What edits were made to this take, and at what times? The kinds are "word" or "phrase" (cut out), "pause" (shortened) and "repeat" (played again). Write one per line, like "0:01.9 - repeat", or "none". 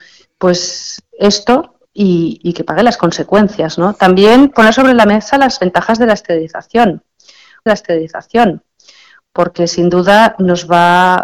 0:02.4 - word
0:07.7 - repeat